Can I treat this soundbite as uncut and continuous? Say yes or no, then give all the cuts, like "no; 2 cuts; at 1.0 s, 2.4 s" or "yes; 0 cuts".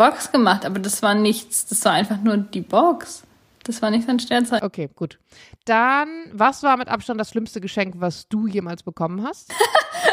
yes; 0 cuts